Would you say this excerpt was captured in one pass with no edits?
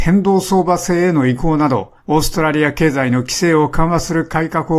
no; 1 cut; at 2.0 s

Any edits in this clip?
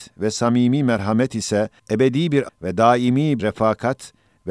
yes; 3 cuts; at 1.8 s, 2.5 s, 3.4 s

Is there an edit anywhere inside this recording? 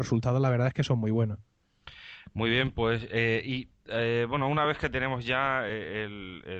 no; 0 cuts

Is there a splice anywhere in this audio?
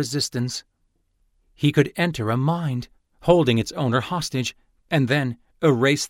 no; 0 cuts

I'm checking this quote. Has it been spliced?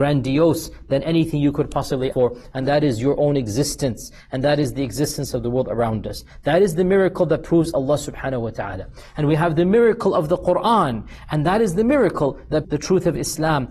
yes; 2 cuts; at 2.1 s, 12.6 s

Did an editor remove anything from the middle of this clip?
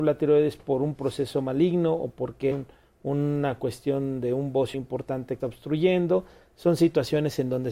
yes; 3 cuts; at 2.5 s, 4.7 s, 5.4 s

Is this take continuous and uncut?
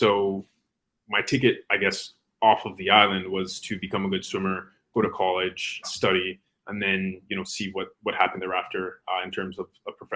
no; 1 cut; at 5.8 s

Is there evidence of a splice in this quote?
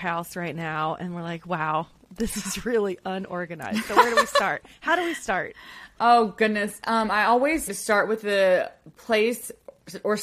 yes; 1 cut; at 7.7 s

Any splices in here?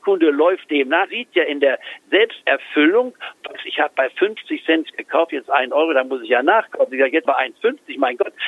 yes; 2 cuts; at 1.1 s, 7.2 s

